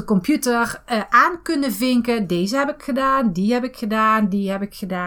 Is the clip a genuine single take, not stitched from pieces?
yes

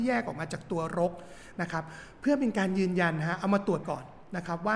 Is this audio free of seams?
no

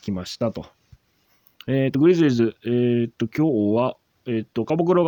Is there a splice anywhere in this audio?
no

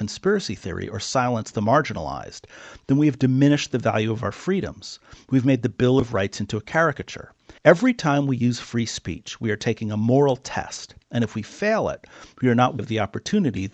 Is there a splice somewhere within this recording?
yes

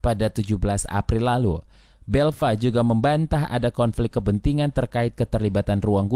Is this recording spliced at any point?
no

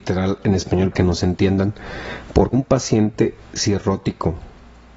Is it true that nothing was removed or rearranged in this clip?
no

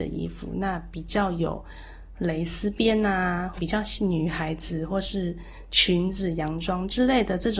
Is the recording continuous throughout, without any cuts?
no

